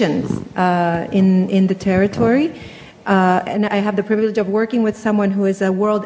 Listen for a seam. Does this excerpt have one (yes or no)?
yes